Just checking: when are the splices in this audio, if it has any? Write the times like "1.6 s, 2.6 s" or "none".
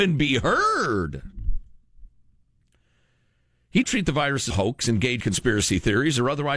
3.8 s, 4.5 s, 5.2 s